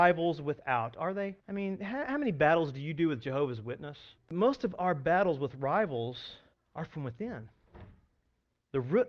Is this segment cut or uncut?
cut